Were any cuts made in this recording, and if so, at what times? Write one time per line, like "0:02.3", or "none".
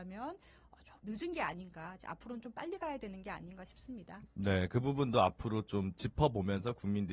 0:01.0

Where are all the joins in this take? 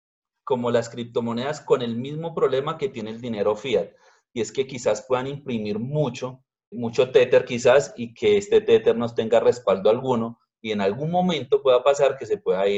0:06.7

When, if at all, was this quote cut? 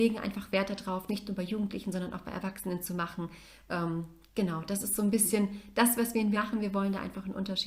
0:01.1
0:06.3

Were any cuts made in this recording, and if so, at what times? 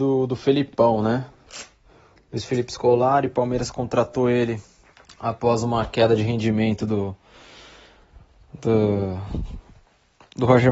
0:04.8

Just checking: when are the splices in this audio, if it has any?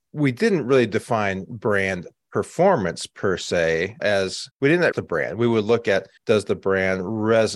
0:04.0
0:04.5
0:04.9
0:06.2

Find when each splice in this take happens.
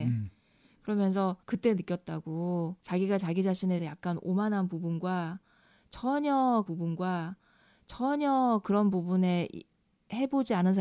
0:01.4
0:02.8
0:03.8
0:06.7

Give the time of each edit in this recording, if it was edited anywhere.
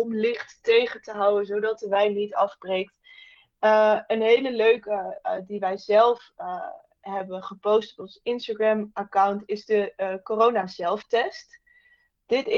none

